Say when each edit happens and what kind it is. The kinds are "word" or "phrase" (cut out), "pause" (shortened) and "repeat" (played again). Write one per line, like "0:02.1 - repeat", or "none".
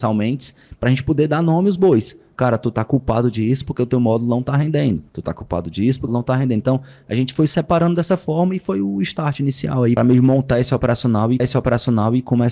0:05.1 - pause
0:06.1 - phrase
0:10.0 - word
0:11.4 - repeat